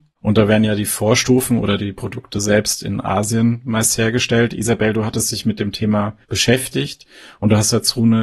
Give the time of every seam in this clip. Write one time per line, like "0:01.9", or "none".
0:06.2